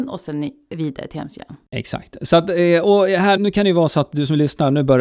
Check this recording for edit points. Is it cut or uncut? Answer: cut